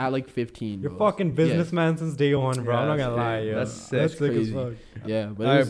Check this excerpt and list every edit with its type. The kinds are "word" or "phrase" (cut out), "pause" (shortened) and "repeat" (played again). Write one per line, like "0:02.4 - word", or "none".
none